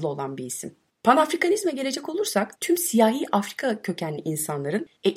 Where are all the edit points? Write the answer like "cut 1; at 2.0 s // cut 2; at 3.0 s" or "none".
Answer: cut 1; at 2.5 s